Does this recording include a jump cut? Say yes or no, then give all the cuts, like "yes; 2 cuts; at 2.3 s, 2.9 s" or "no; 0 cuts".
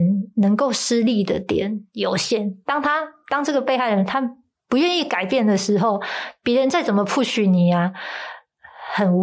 no; 0 cuts